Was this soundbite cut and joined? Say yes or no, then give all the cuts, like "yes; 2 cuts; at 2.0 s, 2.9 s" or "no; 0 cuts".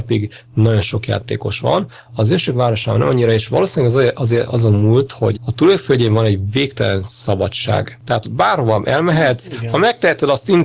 yes; 2 cuts; at 5.3 s, 8.2 s